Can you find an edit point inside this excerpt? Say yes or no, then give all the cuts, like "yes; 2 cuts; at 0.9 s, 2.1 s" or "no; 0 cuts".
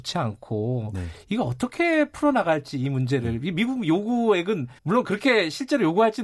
yes; 1 cut; at 4.8 s